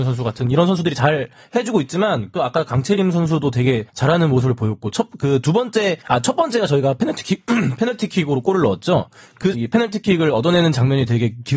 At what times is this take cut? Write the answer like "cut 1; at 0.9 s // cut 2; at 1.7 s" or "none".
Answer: cut 1; at 2.4 s // cut 2; at 3.9 s // cut 3; at 6.0 s // cut 4; at 9.5 s